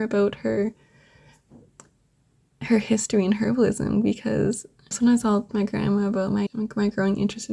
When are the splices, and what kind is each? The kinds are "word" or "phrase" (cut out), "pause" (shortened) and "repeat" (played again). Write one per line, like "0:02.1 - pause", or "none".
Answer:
0:04.9 - word
0:05.5 - word
0:06.5 - word